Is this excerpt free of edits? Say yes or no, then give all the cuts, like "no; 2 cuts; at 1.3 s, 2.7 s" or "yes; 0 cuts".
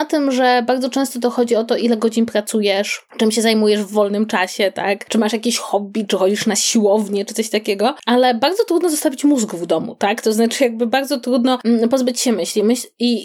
yes; 0 cuts